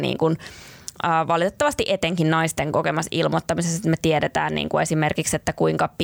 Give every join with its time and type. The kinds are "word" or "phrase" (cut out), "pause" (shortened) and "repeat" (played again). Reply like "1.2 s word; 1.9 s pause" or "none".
none